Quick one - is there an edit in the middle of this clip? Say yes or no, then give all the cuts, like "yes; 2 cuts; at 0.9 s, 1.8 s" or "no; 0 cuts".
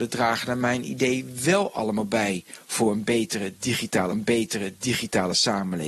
yes; 1 cut; at 4.1 s